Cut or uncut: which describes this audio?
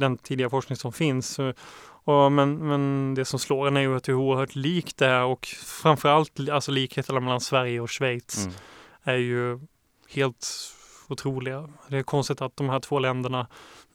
uncut